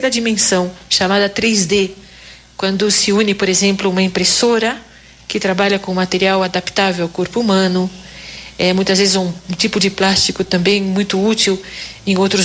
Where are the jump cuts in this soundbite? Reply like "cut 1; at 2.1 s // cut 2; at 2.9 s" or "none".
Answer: none